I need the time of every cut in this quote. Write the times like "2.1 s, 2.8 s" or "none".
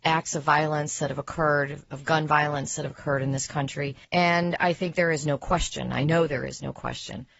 4.0 s